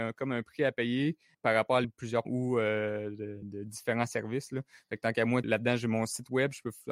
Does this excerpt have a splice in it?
yes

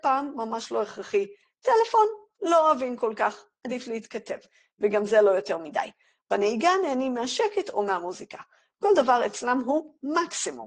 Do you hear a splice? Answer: no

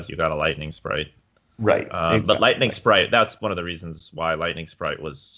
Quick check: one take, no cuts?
yes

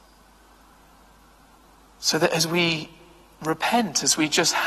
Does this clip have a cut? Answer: no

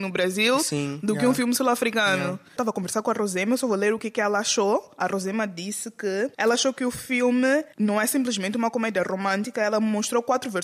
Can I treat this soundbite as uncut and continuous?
no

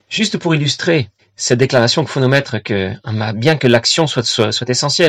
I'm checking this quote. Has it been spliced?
yes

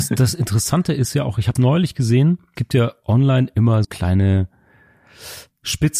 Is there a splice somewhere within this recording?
yes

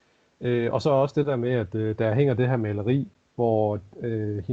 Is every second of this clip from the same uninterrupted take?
no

